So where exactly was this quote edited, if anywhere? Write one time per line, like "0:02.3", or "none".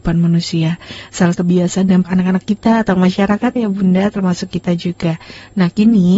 0:01.3
0:02.0
0:03.6